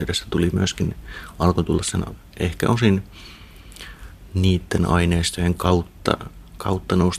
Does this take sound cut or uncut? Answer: uncut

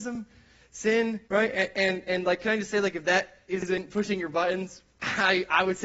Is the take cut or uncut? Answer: cut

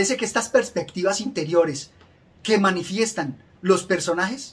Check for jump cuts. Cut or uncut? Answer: uncut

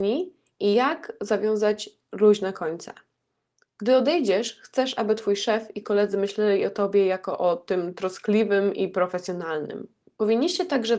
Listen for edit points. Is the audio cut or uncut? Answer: uncut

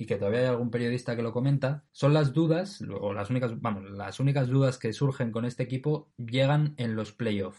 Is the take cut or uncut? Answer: uncut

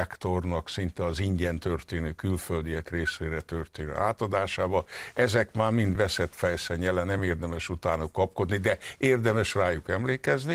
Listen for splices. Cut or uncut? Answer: uncut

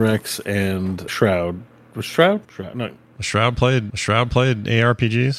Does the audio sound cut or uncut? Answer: cut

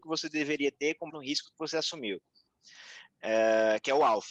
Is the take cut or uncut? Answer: cut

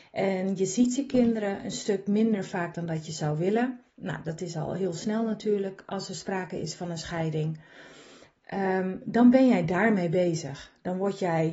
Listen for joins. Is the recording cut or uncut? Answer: cut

